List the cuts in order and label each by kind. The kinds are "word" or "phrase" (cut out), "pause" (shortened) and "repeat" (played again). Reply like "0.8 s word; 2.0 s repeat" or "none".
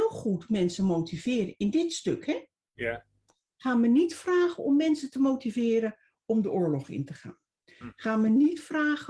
none